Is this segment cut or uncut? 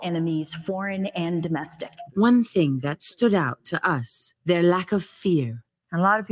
cut